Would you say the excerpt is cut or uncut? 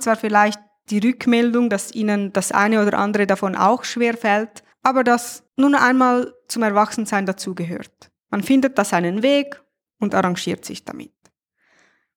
uncut